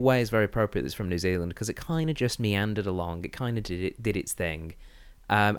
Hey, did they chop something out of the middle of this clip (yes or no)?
no